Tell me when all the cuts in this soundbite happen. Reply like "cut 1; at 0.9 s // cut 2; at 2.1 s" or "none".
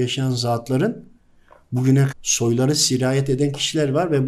cut 1; at 2.1 s